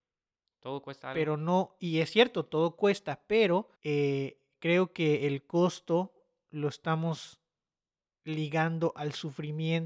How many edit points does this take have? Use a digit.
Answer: 1